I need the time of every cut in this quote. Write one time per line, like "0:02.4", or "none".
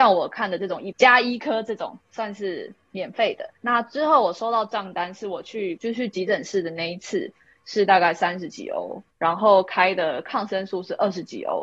0:03.6